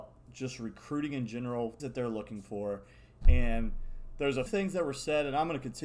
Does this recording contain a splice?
yes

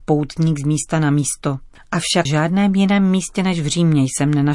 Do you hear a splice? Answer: yes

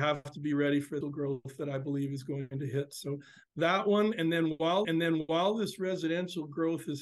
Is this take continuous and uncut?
no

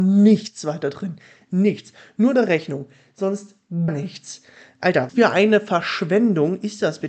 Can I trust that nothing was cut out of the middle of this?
no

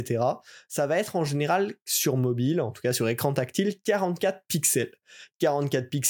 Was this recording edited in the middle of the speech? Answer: no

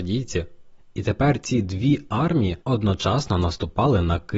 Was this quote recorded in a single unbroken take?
no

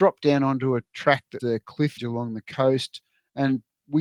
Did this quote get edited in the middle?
yes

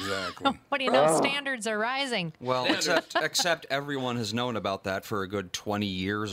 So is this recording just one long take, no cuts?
yes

